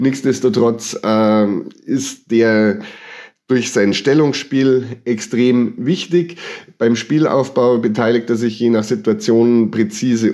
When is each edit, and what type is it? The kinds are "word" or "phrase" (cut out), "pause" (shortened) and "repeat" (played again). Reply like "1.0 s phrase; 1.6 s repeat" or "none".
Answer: none